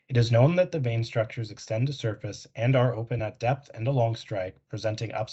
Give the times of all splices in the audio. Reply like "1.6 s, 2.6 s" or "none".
none